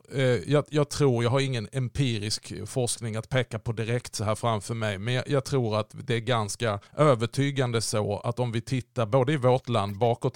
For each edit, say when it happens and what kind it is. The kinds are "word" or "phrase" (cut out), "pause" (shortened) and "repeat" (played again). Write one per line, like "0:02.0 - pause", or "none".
0:06.9 - pause